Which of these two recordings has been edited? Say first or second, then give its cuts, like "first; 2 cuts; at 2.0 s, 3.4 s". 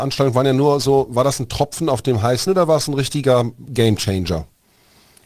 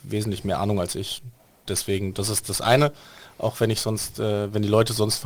first; 1 cut; at 2.5 s